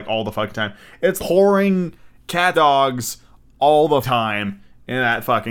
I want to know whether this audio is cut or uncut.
cut